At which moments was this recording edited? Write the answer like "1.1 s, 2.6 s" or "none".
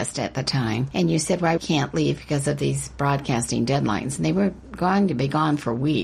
1.6 s